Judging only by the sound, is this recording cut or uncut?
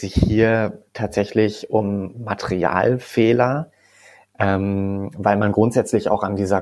uncut